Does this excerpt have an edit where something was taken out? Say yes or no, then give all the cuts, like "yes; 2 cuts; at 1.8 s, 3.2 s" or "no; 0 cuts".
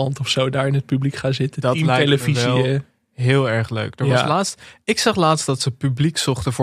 no; 0 cuts